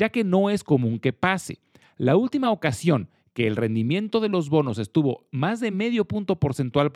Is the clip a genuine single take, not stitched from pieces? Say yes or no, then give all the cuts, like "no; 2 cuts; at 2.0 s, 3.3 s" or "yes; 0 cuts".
yes; 0 cuts